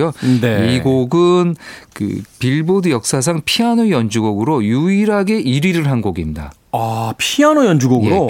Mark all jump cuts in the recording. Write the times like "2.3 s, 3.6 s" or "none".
1.9 s, 2.3 s